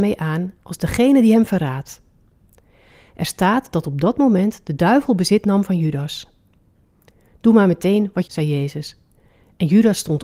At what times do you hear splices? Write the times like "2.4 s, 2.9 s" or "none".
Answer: 8.2 s